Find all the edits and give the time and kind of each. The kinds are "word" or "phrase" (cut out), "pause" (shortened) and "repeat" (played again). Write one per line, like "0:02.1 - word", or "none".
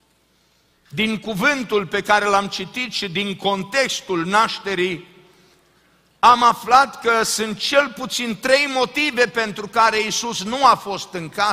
none